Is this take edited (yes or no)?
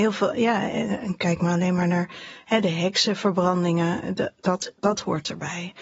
no